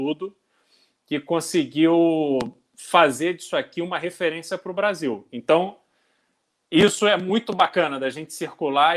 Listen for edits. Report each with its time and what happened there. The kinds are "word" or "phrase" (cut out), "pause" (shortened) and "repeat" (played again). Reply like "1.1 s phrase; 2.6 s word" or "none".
none